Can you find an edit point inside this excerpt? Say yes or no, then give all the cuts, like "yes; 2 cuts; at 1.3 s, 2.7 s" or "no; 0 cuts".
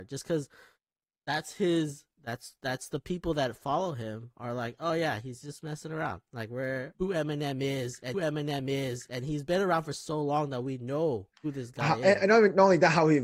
yes; 3 cuts; at 6.9 s, 8.1 s, 11.3 s